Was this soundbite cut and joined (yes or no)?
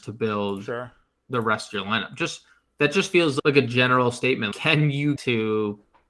yes